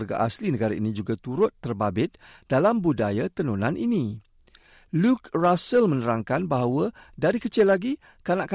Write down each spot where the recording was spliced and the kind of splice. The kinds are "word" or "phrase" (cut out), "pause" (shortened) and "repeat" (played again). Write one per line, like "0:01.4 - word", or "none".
none